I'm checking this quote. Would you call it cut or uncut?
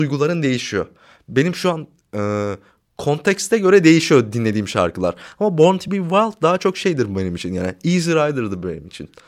uncut